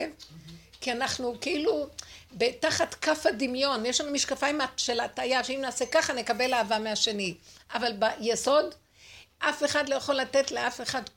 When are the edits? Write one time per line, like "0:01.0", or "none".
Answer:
none